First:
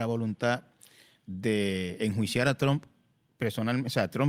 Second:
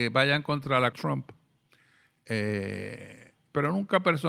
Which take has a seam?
second; 1 cut; at 0.9 s

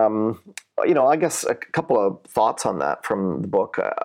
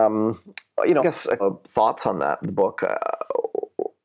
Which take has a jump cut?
second; 3 cuts; at 1.0 s, 1.4 s, 2.4 s

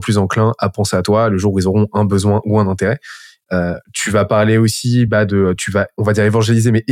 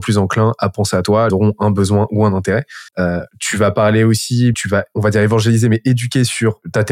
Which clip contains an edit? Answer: second; 3 cuts; at 1.3 s, 2.9 s, 4.5 s

